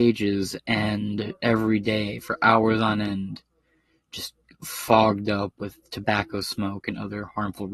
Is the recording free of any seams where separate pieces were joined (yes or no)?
yes